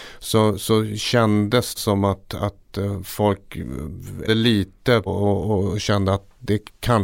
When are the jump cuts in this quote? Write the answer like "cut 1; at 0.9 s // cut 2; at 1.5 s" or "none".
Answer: cut 1; at 1.8 s // cut 2; at 4.3 s // cut 3; at 5.1 s

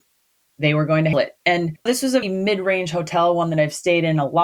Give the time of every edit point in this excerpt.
cut 1; at 1.1 s // cut 2; at 1.9 s // cut 3; at 2.2 s

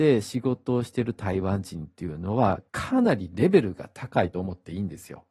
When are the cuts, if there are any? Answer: cut 1; at 2.7 s

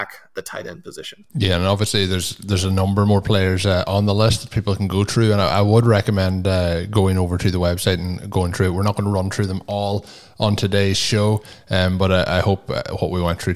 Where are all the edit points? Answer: cut 1; at 1.3 s

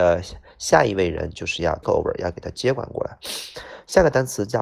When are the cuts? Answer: cut 1; at 1.8 s

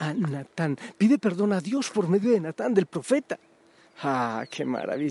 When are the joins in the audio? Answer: none

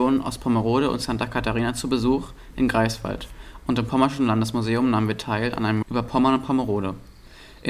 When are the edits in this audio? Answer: cut 1; at 5.8 s

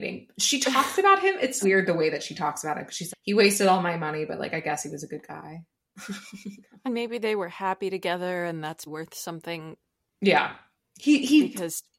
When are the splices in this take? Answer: cut 1; at 1.6 s // cut 2; at 3.1 s // cut 3; at 6.8 s // cut 4; at 8.9 s

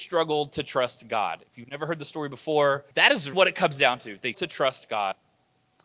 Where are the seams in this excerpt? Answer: cut 1; at 2.9 s // cut 2; at 3.3 s // cut 3; at 4.3 s

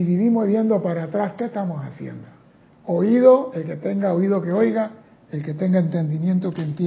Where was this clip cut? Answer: cut 1; at 2.7 s

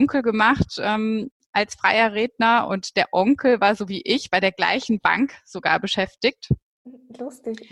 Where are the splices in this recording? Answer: none

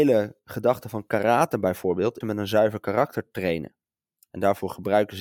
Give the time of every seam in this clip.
cut 1; at 2.2 s

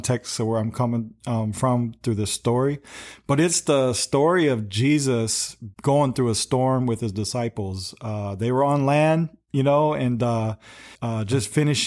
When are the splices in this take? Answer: cut 1; at 5.7 s // cut 2; at 10.9 s

